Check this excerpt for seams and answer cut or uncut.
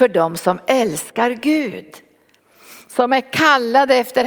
uncut